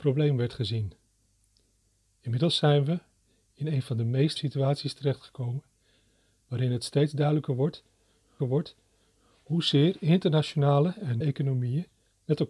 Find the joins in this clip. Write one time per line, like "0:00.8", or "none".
0:04.4
0:08.4
0:11.2